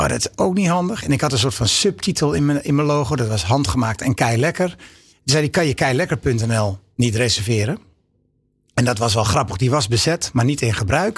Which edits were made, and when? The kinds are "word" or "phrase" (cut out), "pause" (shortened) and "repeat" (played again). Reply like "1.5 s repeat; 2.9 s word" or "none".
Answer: none